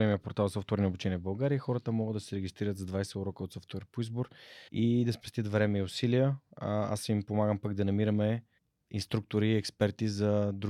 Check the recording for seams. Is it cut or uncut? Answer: cut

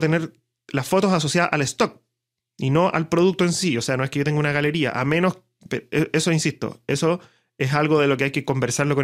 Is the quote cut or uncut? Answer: uncut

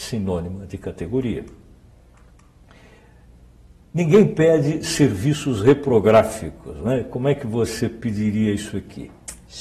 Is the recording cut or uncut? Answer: uncut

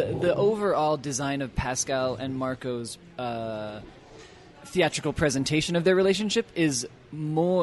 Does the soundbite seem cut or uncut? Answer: uncut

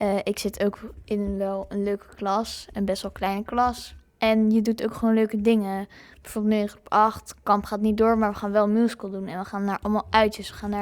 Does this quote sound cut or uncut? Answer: uncut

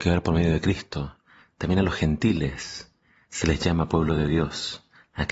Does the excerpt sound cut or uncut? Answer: uncut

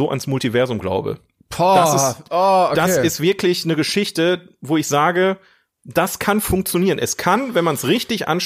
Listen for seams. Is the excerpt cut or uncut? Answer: uncut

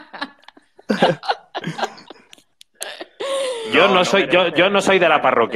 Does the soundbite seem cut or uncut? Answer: uncut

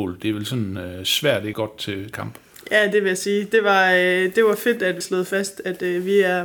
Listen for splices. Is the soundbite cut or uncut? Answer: cut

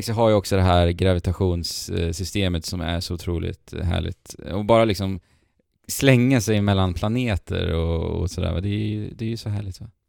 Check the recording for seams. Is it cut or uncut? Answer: uncut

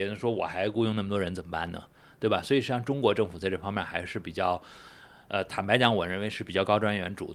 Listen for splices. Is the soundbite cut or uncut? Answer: uncut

